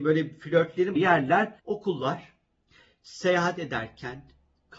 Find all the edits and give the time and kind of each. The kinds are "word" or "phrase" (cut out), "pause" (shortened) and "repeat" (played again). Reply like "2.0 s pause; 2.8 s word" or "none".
1.0 s word; 1.6 s pause